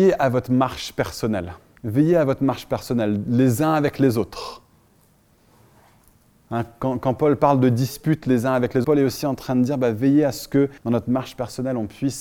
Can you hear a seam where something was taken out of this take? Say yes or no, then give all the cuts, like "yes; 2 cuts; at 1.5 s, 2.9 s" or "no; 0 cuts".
yes; 3 cuts; at 1.8 s, 8.8 s, 10.8 s